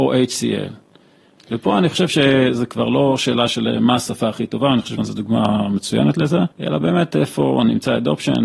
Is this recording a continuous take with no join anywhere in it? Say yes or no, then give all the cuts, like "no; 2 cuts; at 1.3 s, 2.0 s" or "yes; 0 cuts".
no; 2 cuts; at 5.0 s, 6.5 s